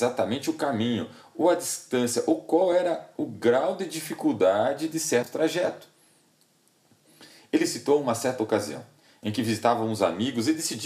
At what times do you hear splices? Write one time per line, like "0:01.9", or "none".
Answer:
none